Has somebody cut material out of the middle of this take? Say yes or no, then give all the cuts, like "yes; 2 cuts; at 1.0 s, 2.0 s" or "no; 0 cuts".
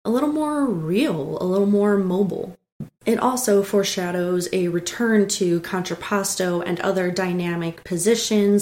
yes; 1 cut; at 2.9 s